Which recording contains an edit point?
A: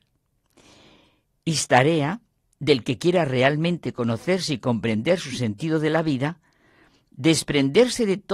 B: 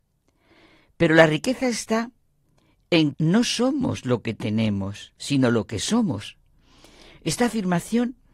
B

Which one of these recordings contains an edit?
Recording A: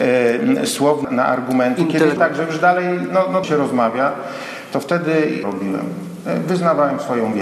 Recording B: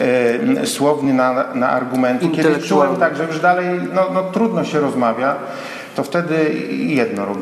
A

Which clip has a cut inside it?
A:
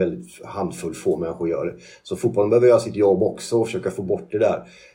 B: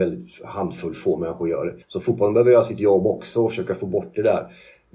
B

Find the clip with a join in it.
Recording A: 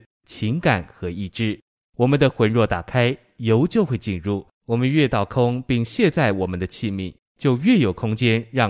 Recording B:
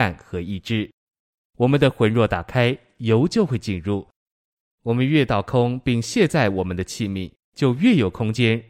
A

